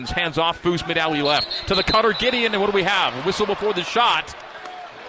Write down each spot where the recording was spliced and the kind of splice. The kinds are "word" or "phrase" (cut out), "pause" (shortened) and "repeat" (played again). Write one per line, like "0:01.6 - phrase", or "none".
none